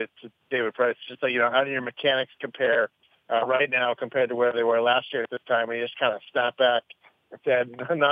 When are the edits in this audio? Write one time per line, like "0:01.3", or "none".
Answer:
0:01.5

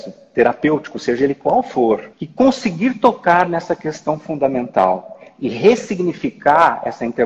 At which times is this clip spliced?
0:02.1

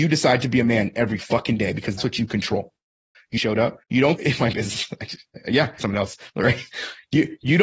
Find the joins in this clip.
0:02.0
0:03.4
0:03.8
0:04.2
0:05.8

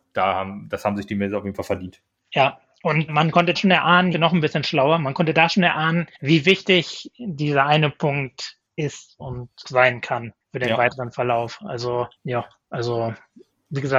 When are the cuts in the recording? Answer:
0:02.2
0:03.1
0:03.6
0:04.1
0:06.1
0:09.6
0:10.4
0:12.2

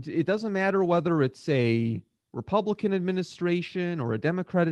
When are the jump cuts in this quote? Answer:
none

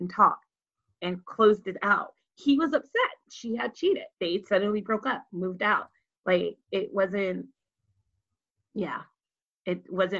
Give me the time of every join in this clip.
0:04.1

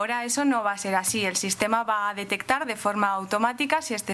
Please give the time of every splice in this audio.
none

